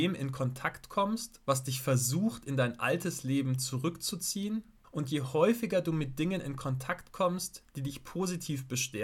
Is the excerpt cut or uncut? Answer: cut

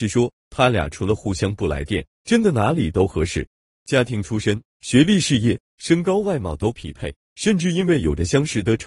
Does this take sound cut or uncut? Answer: uncut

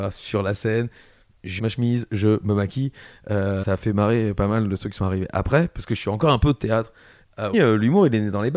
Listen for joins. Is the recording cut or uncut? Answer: cut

